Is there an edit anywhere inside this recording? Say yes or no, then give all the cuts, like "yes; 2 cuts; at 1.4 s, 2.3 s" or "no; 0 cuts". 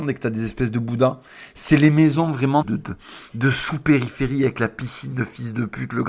yes; 1 cut; at 2.6 s